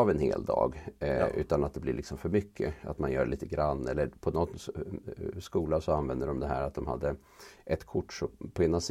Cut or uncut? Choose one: uncut